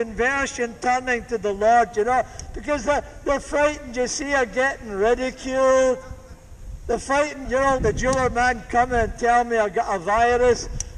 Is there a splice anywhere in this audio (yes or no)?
yes